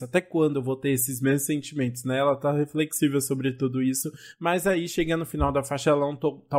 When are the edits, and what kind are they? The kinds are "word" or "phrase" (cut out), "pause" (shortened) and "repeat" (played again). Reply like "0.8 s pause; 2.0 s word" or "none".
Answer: none